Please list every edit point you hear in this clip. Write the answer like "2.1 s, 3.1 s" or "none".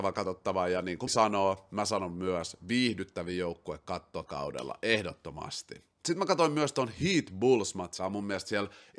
1.1 s, 4.3 s, 8.0 s